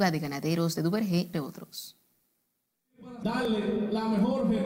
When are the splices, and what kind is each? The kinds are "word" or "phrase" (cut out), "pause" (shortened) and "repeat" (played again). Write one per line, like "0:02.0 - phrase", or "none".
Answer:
0:01.3 - word
0:03.2 - word